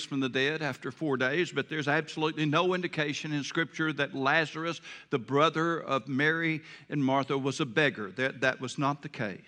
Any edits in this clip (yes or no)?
no